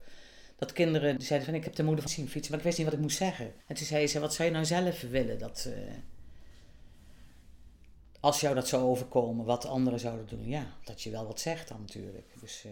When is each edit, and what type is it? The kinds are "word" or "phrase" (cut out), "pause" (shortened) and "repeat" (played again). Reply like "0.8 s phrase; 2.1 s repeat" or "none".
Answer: 1.2 s word; 2.1 s word; 3.6 s pause